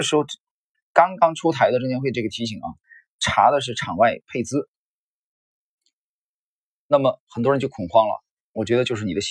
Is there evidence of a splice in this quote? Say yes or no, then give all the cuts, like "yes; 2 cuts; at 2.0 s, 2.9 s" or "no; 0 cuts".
no; 0 cuts